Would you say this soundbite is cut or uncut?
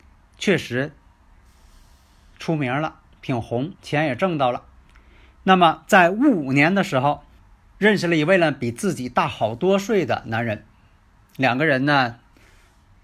cut